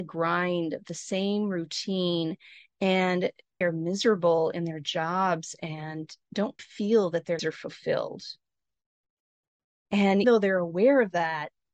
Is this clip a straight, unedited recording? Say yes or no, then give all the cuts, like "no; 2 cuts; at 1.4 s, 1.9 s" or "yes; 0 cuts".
no; 4 cuts; at 3.6 s, 6.6 s, 7.4 s, 10.2 s